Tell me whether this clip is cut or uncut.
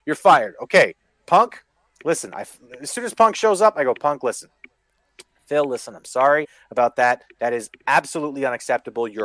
uncut